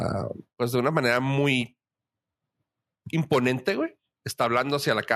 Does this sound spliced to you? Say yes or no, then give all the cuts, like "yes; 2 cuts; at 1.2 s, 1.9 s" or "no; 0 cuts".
no; 0 cuts